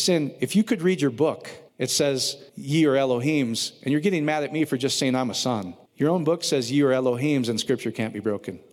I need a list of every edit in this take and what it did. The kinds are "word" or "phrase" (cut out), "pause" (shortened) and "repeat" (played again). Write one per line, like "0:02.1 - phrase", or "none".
0:01.7 - pause
0:02.5 - pause
0:05.9 - pause

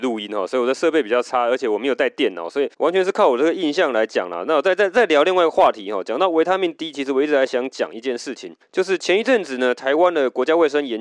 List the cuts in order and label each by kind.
0:02.7 - pause
0:08.6 - pause

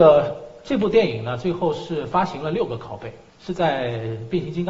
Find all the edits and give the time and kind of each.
0:03.3 - pause

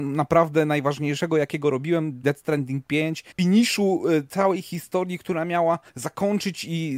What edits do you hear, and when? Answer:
0:02.2 - word
0:03.3 - pause
0:05.9 - pause

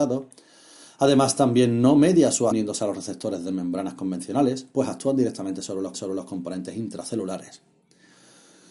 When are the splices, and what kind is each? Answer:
0:02.5 - word
0:05.9 - repeat

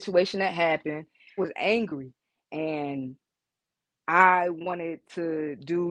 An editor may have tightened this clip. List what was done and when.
0:01.4 - word

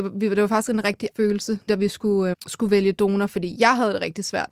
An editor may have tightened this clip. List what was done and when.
0:01.1 - word
0:01.7 - word
0:02.3 - word

